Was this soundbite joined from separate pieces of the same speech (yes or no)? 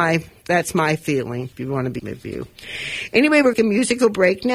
yes